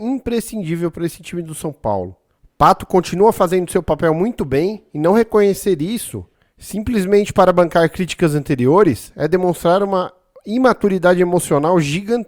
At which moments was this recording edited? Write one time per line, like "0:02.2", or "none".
none